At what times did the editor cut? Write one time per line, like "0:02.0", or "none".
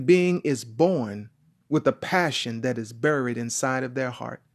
none